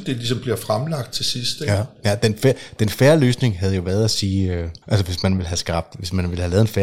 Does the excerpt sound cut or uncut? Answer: cut